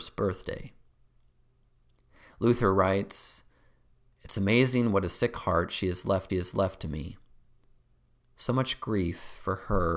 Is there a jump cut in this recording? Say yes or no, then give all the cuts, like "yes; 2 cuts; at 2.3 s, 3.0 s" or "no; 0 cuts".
yes; 1 cut; at 6.3 s